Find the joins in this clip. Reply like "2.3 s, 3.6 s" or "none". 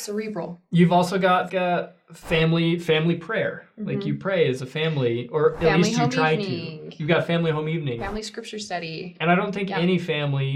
1.5 s